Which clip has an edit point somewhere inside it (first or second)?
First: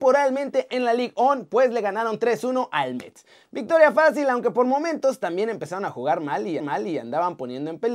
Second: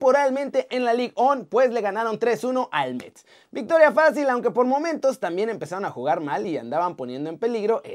first